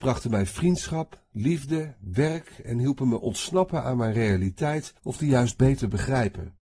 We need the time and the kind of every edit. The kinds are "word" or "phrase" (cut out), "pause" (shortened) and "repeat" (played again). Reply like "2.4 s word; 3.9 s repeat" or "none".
5.0 s pause